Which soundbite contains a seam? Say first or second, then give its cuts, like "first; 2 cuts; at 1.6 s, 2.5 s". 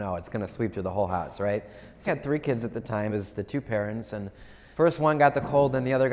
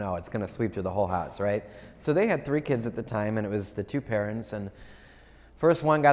first; 3 cuts; at 2.1 s, 3.1 s, 4.7 s